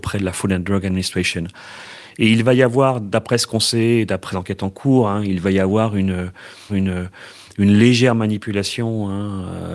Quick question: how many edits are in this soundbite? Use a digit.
2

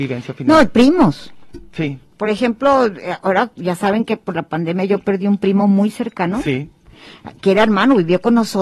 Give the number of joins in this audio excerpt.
0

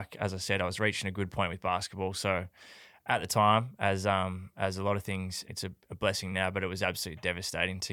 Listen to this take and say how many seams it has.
1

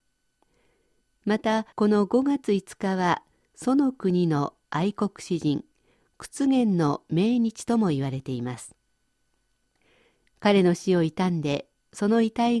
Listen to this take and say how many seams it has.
1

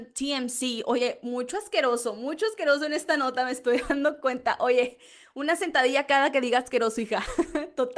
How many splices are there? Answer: 0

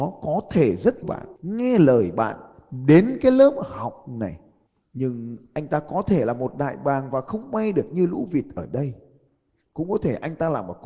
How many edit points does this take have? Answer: 2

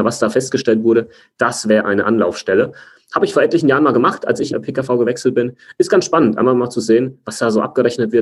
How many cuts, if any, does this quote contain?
1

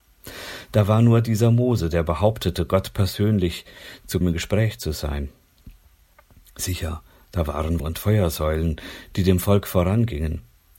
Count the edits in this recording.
2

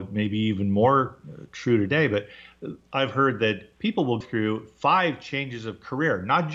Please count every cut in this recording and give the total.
1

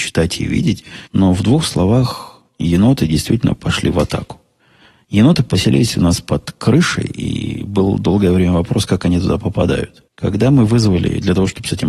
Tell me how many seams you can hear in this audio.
2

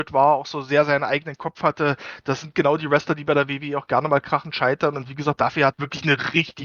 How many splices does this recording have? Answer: 1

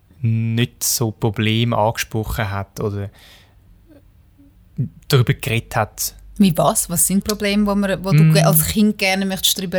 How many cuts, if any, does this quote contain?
1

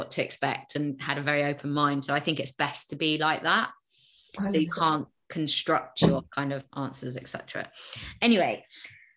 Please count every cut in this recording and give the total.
2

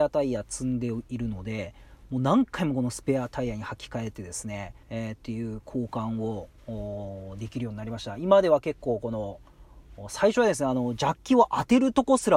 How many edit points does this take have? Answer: 1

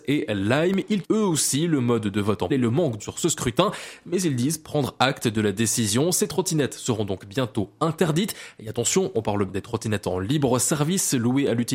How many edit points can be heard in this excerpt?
4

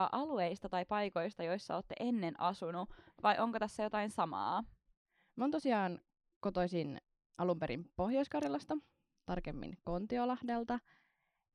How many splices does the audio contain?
0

